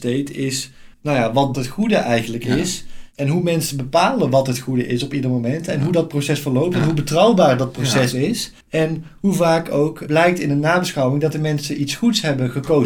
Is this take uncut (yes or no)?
no